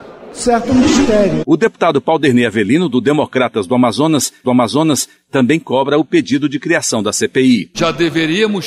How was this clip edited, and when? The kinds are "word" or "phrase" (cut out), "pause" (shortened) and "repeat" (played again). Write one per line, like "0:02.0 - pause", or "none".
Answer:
0:04.4 - repeat